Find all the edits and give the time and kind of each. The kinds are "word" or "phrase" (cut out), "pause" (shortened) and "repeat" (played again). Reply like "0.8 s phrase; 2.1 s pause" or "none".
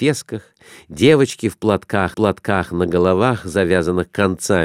2.1 s repeat